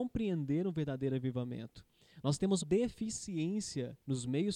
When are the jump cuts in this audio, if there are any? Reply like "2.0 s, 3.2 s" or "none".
2.6 s